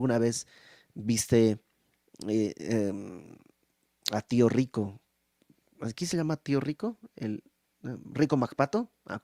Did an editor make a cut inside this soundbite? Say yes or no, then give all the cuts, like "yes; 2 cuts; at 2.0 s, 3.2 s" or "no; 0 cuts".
no; 0 cuts